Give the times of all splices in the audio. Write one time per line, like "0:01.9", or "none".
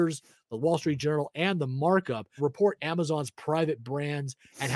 0:02.4